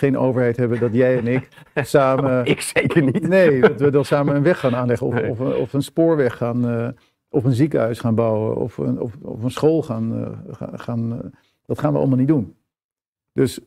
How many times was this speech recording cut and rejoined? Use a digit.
0